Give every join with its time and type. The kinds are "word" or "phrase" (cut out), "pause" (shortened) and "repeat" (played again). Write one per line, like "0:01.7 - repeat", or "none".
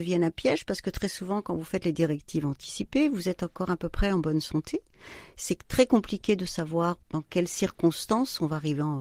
0:07.0 - pause